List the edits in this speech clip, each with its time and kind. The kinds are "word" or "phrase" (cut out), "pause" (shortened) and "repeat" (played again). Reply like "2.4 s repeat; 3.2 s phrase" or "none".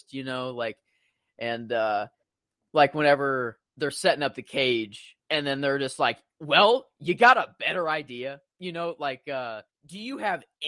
2.2 s pause; 3.7 s pause; 5.2 s pause; 9.7 s pause